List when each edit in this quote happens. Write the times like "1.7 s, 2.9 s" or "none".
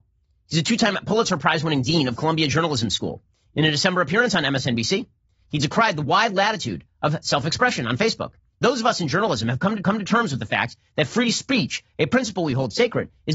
8.6 s, 9.8 s